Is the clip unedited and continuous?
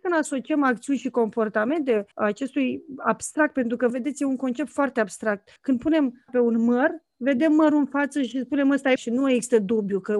no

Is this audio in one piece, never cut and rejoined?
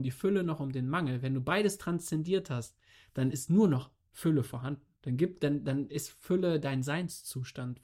yes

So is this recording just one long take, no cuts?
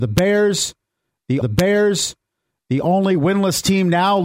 no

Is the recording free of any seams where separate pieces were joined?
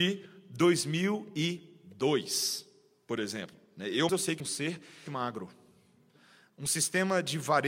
no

